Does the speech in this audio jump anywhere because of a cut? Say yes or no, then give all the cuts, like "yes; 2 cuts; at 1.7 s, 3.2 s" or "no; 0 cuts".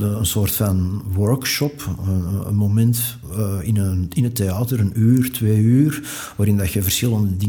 no; 0 cuts